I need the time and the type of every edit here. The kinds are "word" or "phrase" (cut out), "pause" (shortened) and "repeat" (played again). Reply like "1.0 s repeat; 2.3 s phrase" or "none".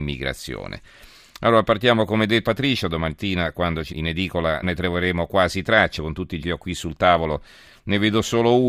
2.4 s word; 3.9 s word; 4.6 s word; 6.0 s word; 6.4 s word